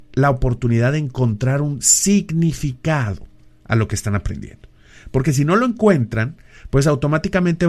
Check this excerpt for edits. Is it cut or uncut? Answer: uncut